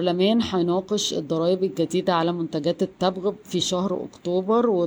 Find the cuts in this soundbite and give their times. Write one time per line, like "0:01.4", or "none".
none